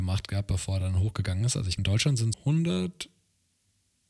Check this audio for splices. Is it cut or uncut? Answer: cut